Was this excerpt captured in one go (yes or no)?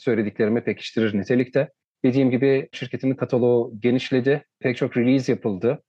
no